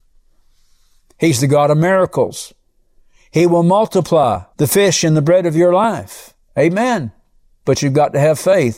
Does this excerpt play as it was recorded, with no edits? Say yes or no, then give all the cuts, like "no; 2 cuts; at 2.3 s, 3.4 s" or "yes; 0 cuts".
no; 1 cut; at 4.5 s